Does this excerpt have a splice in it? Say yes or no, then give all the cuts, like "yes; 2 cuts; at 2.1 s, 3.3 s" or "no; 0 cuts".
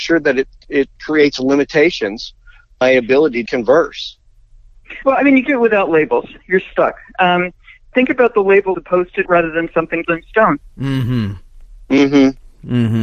yes; 8 cuts; at 1.0 s, 2.8 s, 3.5 s, 5.5 s, 7.9 s, 8.7 s, 9.2 s, 10.0 s